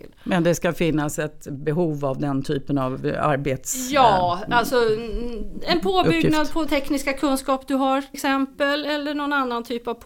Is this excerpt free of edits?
no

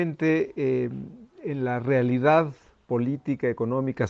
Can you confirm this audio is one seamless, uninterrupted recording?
yes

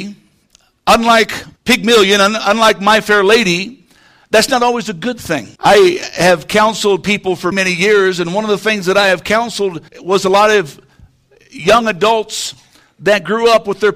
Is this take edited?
yes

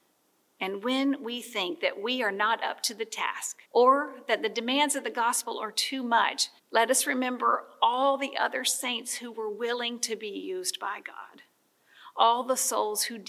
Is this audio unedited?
no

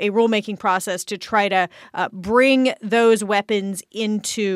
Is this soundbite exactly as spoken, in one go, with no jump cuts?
yes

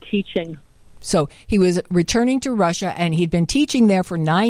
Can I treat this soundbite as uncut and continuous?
yes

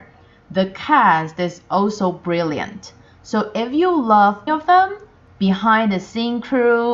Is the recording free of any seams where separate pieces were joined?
no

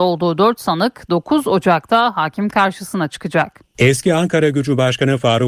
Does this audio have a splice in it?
yes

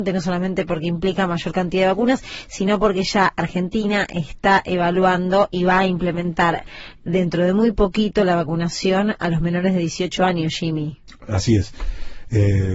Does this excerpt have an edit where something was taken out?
no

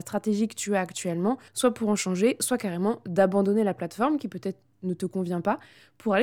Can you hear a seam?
yes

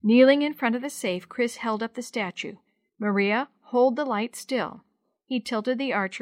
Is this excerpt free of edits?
yes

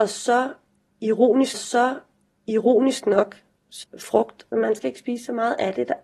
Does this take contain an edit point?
yes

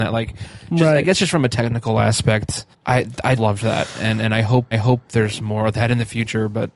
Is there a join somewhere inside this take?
yes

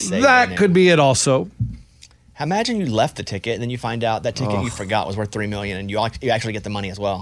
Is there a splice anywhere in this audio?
no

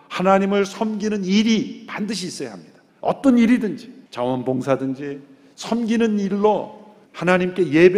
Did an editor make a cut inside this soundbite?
yes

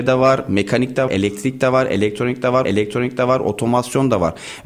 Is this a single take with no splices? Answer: no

